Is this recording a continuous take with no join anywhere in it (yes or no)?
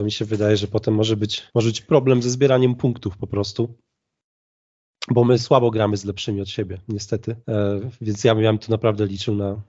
no